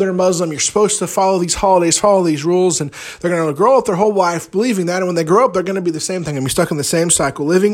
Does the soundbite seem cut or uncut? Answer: uncut